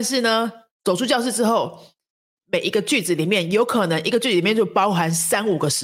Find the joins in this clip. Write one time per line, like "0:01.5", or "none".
none